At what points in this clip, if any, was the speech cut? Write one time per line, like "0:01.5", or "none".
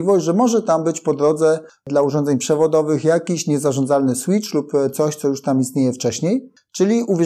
none